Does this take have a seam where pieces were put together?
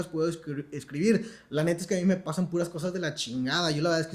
no; 0 cuts

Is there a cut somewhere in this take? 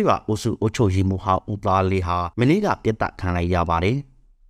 yes; 1 cut; at 2.3 s

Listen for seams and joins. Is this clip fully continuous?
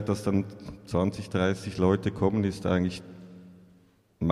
yes; 0 cuts

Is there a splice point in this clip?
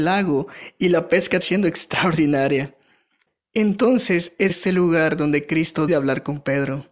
yes; 3 cuts; at 1.4 s, 4.5 s, 5.9 s

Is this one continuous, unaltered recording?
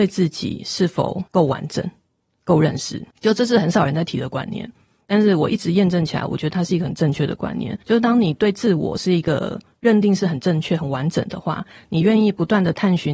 no; 3 cuts; at 1.3 s, 3.1 s, 7.8 s

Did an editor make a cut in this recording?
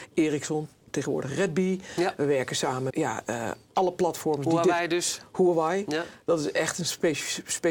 yes; 1 cut; at 2.9 s

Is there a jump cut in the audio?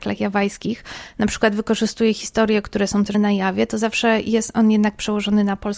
yes; 1 cut; at 3.1 s

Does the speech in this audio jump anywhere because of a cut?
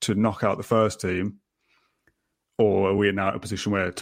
no; 0 cuts

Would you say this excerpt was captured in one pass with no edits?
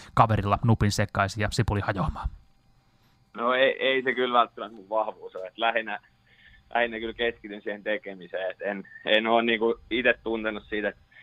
yes; 0 cuts

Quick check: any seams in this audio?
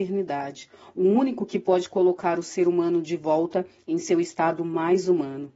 no; 0 cuts

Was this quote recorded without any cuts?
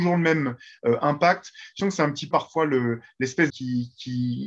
no; 3 cuts; at 1.8 s, 2.3 s, 3.5 s

